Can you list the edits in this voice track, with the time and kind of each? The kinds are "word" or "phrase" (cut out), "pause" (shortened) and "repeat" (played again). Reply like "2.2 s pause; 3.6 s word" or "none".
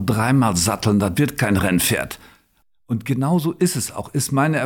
none